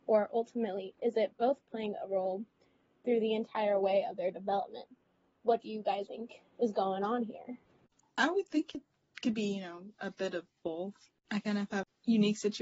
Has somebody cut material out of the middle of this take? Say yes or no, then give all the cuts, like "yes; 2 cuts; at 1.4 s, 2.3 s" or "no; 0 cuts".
yes; 1 cut; at 6.1 s